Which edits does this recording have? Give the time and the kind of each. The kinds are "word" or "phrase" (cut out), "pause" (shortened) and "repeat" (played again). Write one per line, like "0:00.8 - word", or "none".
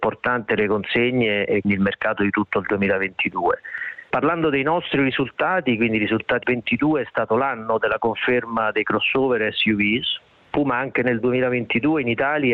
0:01.6 - word
0:06.4 - phrase